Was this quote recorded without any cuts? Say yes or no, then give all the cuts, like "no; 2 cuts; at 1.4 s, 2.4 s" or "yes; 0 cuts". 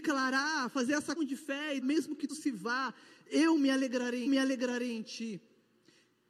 no; 4 cuts; at 1.2 s, 1.8 s, 2.3 s, 4.3 s